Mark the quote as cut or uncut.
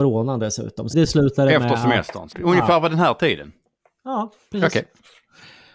cut